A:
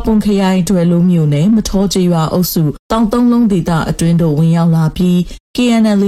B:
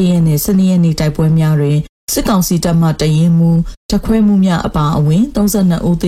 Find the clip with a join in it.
A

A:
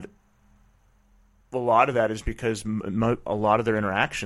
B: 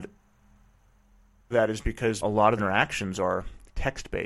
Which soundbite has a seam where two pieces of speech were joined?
B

